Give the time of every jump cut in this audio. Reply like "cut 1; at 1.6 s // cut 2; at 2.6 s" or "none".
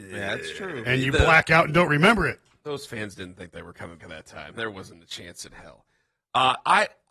cut 1; at 4.0 s